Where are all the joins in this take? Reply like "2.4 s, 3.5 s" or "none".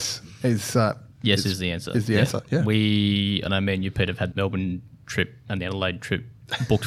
4.3 s